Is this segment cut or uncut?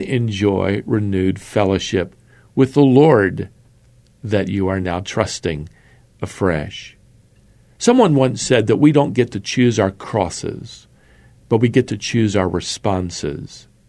uncut